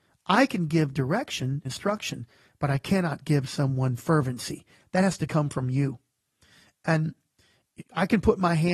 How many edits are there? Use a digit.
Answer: 2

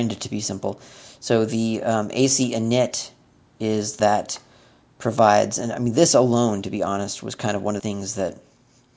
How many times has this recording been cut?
2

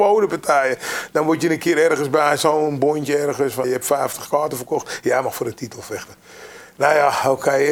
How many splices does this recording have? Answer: 1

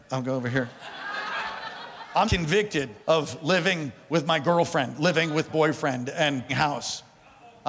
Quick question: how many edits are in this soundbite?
4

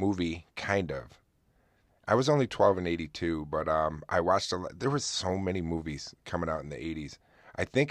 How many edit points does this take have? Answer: 0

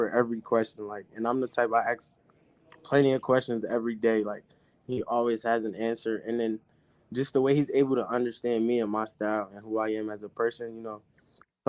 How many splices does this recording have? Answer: 0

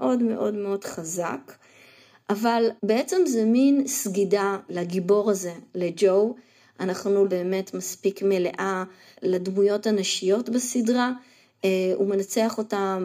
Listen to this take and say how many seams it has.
2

